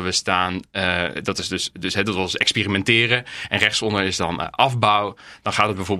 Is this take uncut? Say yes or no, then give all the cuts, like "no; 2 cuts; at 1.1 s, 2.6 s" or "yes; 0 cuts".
yes; 0 cuts